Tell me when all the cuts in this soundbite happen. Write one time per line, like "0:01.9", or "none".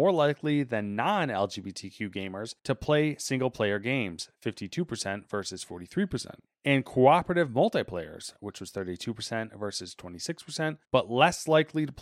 0:02.6
0:06.5
0:10.8